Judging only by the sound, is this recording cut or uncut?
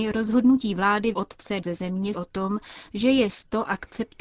cut